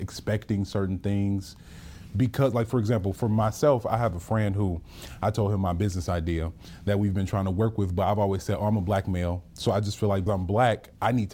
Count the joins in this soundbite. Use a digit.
1